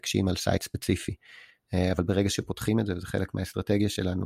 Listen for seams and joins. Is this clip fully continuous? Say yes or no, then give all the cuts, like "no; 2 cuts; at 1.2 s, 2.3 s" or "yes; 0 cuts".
yes; 0 cuts